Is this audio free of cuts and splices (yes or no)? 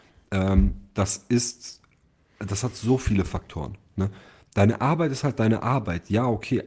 yes